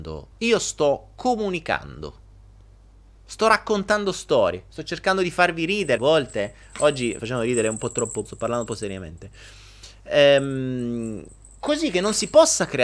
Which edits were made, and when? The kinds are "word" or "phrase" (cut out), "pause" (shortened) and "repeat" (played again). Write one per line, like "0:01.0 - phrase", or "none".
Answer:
0:06.0 - word
0:07.2 - word
0:08.2 - word
0:08.7 - word